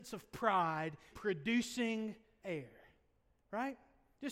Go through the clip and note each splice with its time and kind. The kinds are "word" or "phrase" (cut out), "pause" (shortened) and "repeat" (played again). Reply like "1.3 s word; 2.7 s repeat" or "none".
1.1 s word; 2.4 s word